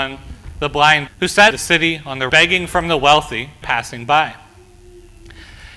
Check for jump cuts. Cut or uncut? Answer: cut